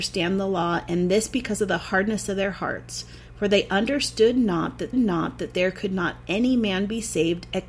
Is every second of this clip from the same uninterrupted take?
no; 1 cut; at 4.9 s

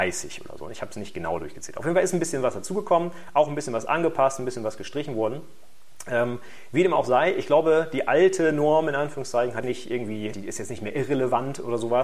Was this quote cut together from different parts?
yes; 2 cuts; at 9.6 s, 10.3 s

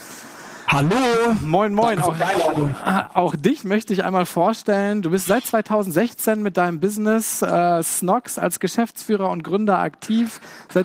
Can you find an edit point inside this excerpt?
no; 0 cuts

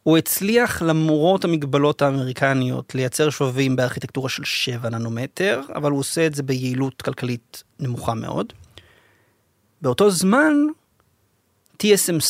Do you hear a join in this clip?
yes; 1 cut; at 7.7 s

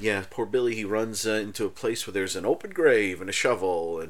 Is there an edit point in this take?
no; 0 cuts

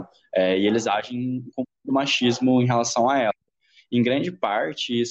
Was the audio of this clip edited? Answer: no; 0 cuts

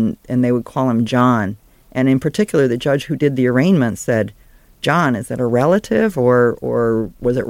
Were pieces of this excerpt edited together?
no; 0 cuts

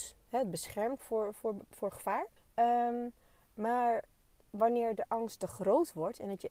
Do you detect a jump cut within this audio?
yes; 2 cuts; at 1.0 s, 2.4 s

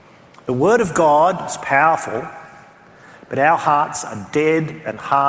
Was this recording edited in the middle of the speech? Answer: no; 0 cuts

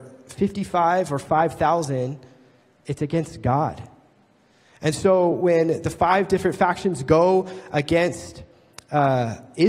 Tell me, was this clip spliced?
no; 0 cuts

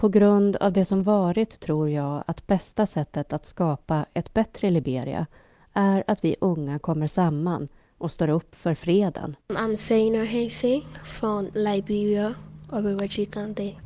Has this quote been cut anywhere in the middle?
yes; 1 cut; at 9.4 s

